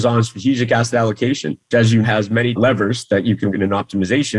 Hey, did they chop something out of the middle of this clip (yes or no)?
yes